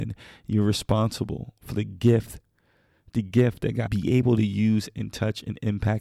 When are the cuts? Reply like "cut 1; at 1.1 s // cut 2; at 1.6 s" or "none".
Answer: cut 1; at 3.9 s